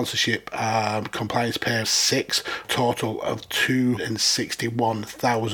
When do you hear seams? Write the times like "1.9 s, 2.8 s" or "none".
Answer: 1.8 s, 2.6 s, 4.0 s